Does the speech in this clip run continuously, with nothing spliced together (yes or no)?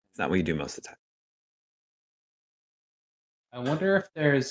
yes